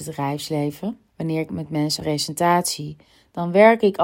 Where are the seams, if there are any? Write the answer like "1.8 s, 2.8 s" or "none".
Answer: 1.1 s, 1.5 s, 2.0 s